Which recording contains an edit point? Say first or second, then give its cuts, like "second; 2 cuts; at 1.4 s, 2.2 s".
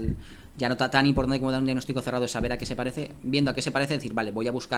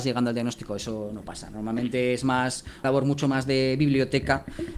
second; 1 cut; at 2.8 s